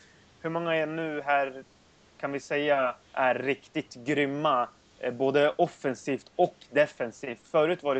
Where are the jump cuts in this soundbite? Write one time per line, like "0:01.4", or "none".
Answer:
0:03.0